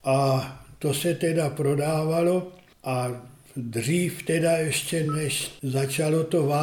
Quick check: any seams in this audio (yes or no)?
no